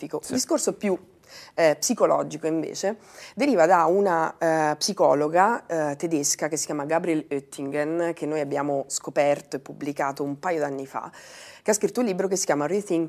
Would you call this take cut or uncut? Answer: uncut